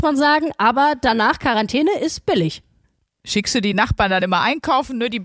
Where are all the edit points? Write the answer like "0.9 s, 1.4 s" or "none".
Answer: none